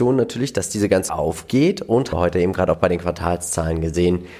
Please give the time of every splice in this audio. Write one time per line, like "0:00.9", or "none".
0:01.1
0:02.1